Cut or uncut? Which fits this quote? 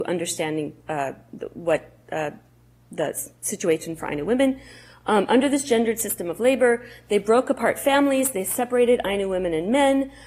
uncut